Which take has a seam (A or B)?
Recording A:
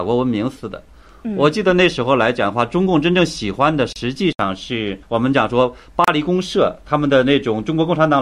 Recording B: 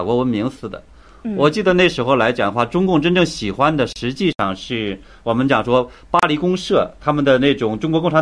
A